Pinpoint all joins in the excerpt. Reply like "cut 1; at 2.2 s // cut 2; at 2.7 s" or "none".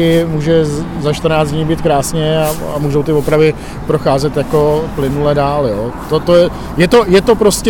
none